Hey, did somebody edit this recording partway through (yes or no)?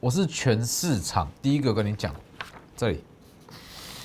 yes